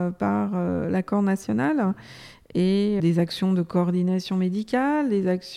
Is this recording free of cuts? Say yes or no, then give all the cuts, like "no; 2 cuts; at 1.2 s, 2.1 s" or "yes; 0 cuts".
no; 1 cut; at 3.0 s